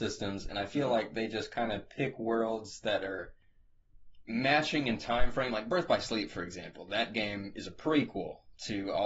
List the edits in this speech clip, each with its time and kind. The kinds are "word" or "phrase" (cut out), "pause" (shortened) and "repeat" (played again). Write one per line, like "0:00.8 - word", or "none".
none